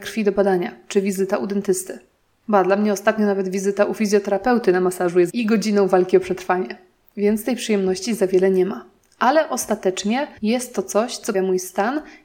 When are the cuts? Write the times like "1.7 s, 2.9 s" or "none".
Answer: 5.3 s, 10.4 s, 11.3 s